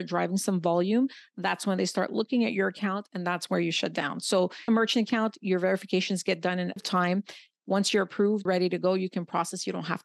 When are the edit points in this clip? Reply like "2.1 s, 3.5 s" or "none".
4.7 s, 6.8 s, 8.5 s